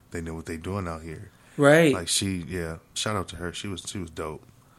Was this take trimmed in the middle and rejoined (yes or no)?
no